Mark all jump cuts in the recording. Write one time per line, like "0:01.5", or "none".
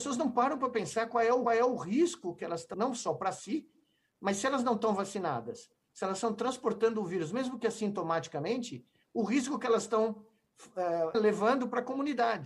0:01.5
0:02.7
0:11.1